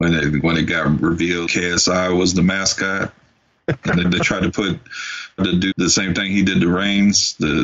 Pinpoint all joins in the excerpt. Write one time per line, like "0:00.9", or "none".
0:01.5
0:04.0
0:05.4
0:05.7